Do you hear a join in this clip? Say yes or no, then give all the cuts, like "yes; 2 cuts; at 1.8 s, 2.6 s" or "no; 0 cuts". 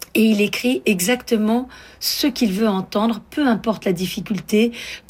no; 0 cuts